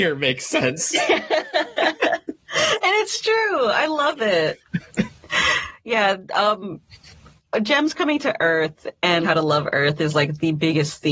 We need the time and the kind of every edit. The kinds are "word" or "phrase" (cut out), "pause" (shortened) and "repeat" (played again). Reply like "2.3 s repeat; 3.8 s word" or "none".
9.2 s word